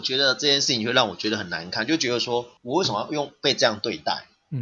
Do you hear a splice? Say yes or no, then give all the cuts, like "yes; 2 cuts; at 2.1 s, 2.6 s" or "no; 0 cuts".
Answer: yes; 1 cut; at 2.6 s